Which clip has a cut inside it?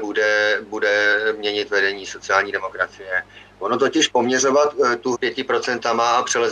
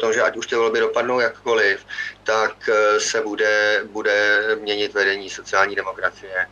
first; 1 cut; at 5.1 s

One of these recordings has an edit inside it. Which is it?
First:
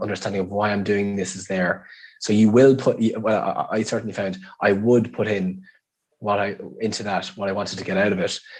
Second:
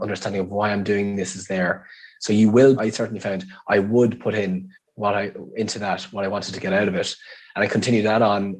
second; 2 cuts; at 2.8 s, 4.8 s

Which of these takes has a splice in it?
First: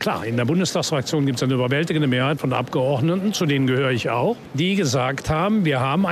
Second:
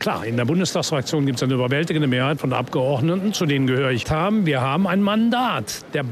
second; 1 cut; at 4.0 s

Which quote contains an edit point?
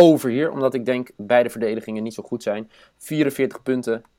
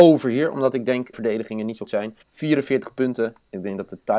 second; 3 cuts; at 1.1 s, 1.9 s, 2.2 s

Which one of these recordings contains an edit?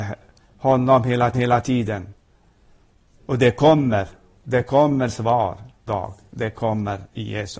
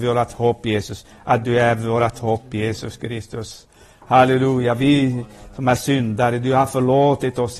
first; 2 cuts; at 1.3 s, 5.9 s

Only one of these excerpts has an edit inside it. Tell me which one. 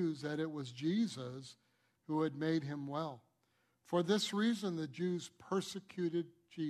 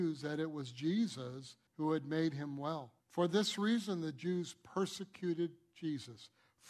second; 2 cuts; at 1.7 s, 3.0 s

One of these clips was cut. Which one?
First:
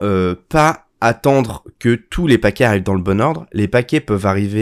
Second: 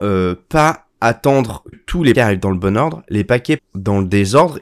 second; 3 cuts; at 1.7 s, 2.1 s, 3.6 s

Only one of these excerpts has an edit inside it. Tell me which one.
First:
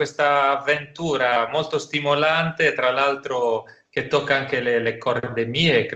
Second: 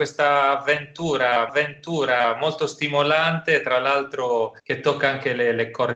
second; 2 cuts; at 1.5 s, 4.6 s

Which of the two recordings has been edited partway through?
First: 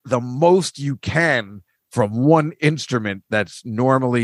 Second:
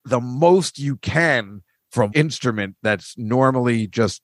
second; 1 cut; at 2.1 s

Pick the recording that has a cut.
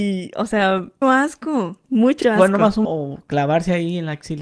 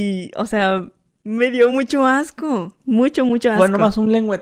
first; 3 cuts; at 1.0 s, 2.2 s, 2.8 s

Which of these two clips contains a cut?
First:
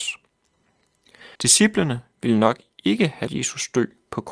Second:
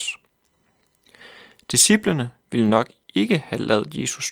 first; 2 cuts; at 1.3 s, 3.3 s

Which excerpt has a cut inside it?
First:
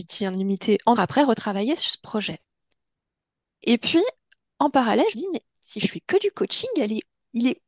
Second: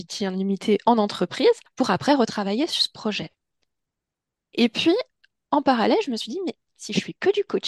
first; 2 cuts; at 1.0 s, 5.1 s

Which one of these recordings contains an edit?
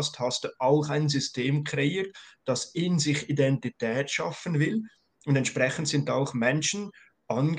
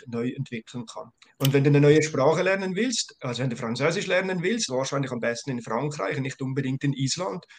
second; 2 cuts; at 1.2 s, 4.7 s

